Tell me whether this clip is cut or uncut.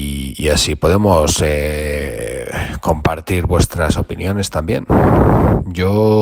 uncut